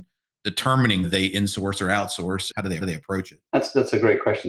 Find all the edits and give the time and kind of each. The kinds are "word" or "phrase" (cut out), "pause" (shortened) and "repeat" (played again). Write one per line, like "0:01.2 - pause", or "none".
0:01.0 - word
0:02.5 - word
0:02.8 - repeat
0:03.5 - pause